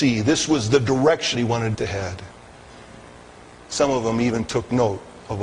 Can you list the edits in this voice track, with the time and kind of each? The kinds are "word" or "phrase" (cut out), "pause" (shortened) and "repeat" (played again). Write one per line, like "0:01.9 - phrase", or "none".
0:01.3 - word
0:01.7 - word